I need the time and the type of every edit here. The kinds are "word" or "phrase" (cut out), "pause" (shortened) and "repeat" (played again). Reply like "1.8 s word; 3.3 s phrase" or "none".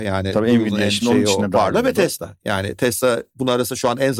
none